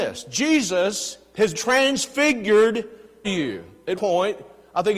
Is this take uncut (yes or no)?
no